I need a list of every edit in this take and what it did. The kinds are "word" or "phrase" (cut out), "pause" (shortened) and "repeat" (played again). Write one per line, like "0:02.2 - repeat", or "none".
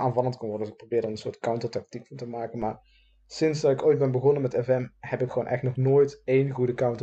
none